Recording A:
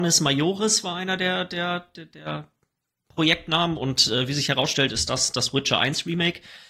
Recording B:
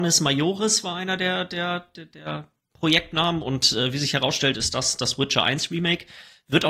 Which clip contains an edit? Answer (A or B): B